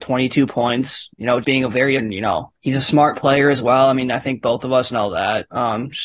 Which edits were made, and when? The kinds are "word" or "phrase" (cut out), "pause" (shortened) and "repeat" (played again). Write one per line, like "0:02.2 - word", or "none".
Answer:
0:01.4 - word
0:02.0 - phrase
0:02.6 - pause